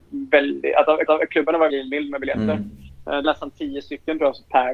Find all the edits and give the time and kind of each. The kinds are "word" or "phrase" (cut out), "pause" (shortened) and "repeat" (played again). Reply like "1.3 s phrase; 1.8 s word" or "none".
1.1 s repeat; 1.7 s word; 3.2 s word